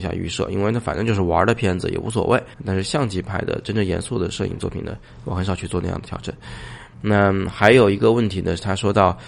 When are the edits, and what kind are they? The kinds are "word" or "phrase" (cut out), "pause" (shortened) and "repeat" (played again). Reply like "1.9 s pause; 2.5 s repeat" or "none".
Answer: 2.5 s pause